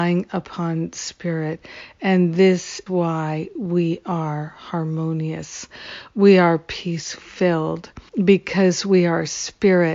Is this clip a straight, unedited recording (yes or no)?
no